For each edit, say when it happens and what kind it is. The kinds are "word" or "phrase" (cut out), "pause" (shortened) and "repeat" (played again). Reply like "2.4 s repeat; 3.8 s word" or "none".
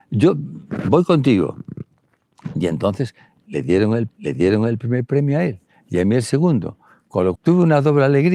4.1 s repeat; 7.4 s word